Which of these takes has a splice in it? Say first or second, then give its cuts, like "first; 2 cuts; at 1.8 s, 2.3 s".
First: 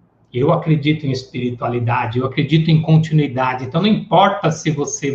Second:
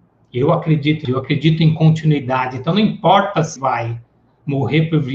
second; 2 cuts; at 1.0 s, 3.6 s